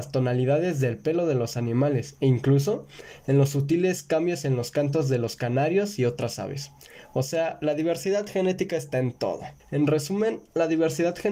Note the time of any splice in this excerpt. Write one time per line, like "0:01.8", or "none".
0:09.6